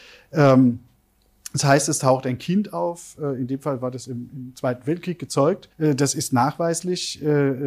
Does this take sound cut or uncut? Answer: cut